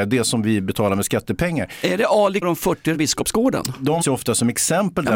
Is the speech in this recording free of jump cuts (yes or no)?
no